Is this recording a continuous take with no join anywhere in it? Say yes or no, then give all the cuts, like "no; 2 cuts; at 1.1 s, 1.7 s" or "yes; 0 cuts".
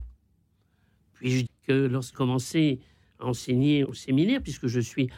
no; 3 cuts; at 1.5 s, 2.1 s, 3.8 s